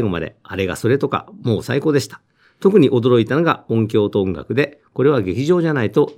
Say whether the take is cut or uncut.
uncut